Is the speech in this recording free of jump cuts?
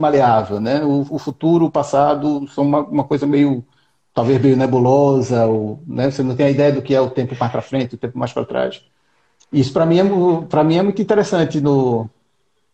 yes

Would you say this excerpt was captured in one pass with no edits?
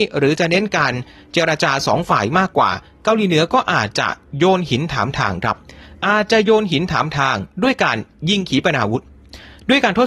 yes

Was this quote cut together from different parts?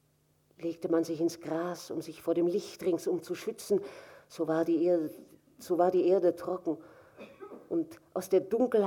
no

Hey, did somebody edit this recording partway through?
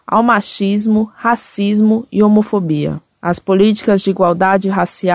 no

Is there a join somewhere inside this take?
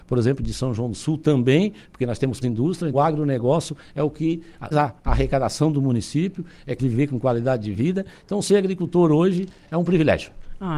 yes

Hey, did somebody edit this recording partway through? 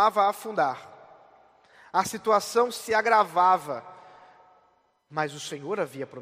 no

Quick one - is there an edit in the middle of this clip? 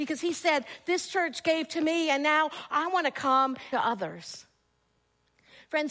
yes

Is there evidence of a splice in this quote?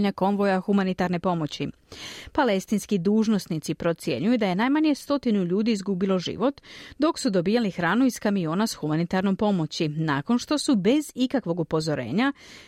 no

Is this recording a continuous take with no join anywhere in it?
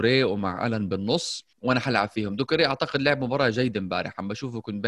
no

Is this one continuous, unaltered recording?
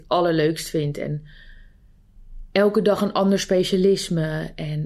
yes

